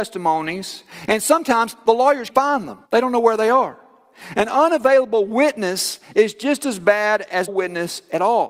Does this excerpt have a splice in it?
yes; 3 cuts; at 2.3 s, 2.8 s, 7.5 s

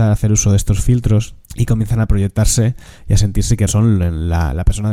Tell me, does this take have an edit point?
yes; 2 cuts; at 1.4 s, 3.7 s

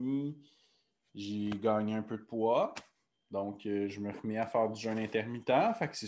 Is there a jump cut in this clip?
no; 0 cuts

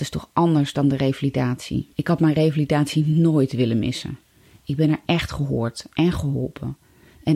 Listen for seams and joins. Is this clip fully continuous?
no; 1 cut; at 1.9 s

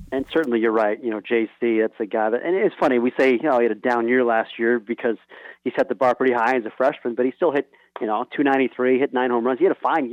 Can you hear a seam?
no; 0 cuts

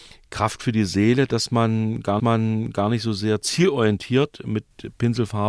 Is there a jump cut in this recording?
yes; 1 cut; at 2.2 s

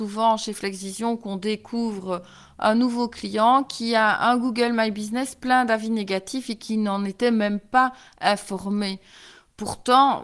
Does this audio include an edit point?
no; 0 cuts

